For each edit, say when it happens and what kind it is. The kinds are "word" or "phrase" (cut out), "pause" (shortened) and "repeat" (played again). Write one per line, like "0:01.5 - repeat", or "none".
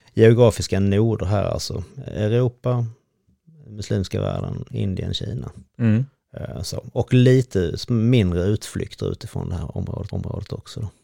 0:10.1 - repeat